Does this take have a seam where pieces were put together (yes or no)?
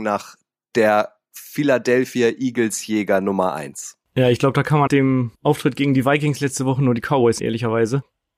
yes